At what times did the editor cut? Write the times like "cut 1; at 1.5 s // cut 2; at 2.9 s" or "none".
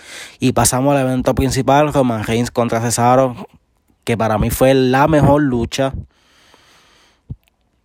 none